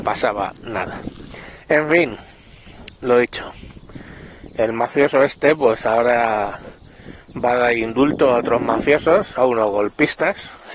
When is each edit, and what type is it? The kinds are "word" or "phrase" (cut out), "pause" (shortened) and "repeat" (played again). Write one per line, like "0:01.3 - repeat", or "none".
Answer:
none